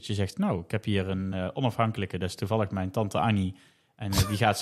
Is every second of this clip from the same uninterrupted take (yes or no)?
yes